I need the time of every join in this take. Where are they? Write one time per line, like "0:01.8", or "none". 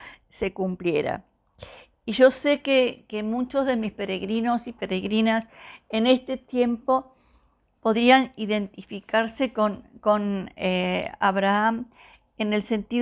none